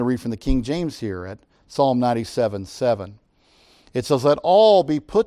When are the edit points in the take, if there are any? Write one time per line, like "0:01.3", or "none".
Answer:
none